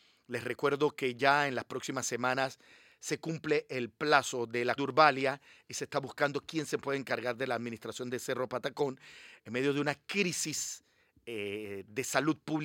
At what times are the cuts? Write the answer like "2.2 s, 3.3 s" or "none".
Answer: 4.8 s